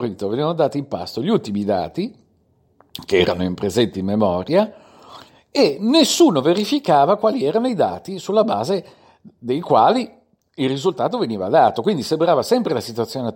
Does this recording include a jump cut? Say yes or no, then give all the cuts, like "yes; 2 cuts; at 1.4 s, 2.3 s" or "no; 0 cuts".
no; 0 cuts